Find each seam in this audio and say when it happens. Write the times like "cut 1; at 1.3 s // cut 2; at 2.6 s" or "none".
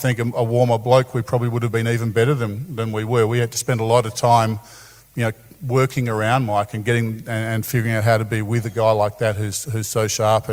none